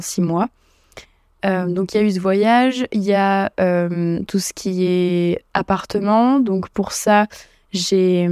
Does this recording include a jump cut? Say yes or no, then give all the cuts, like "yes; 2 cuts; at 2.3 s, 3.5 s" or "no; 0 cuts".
no; 0 cuts